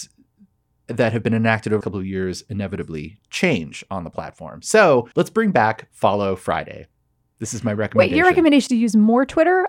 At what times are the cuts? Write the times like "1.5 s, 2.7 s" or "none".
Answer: 1.8 s, 5.1 s, 7.0 s, 8.7 s

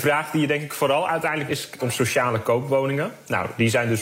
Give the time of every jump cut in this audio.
1.5 s, 1.8 s

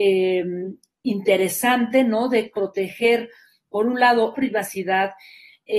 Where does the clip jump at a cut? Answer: 2.5 s, 4.3 s

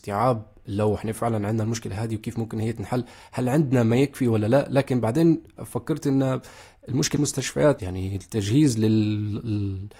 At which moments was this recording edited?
7.2 s, 7.8 s

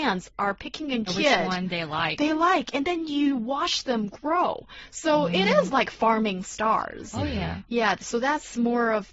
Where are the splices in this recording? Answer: 1.1 s

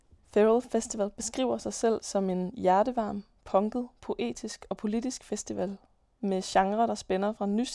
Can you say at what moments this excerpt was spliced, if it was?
none

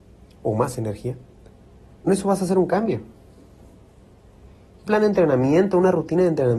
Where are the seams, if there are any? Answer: 2.1 s, 4.9 s

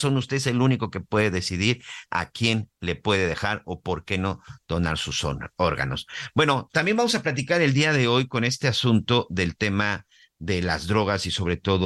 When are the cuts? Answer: none

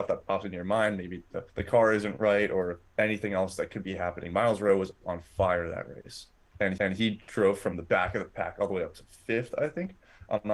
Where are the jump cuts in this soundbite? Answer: 1.5 s, 2.9 s, 6.8 s

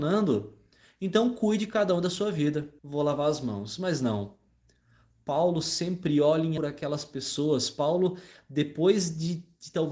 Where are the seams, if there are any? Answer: 2.8 s, 6.6 s

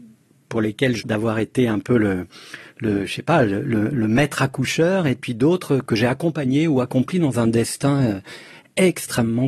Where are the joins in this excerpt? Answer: 1.0 s

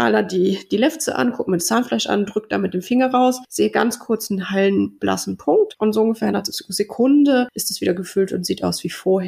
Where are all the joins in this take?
6.3 s

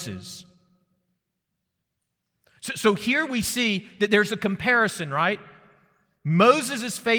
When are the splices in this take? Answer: none

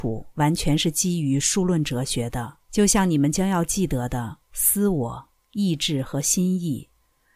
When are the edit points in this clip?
2.6 s, 4.4 s

